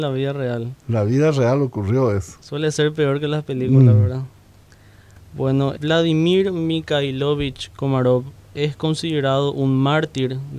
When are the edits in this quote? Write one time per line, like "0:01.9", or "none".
0:05.8